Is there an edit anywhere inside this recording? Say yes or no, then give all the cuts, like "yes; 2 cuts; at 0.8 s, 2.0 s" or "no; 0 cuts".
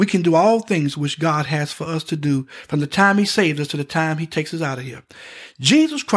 no; 0 cuts